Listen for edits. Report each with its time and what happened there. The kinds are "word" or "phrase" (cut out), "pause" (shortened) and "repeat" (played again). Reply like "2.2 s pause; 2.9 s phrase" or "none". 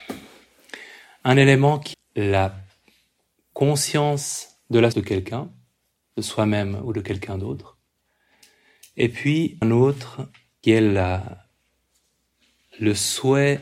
1.9 s word; 4.9 s word; 9.6 s word; 10.6 s word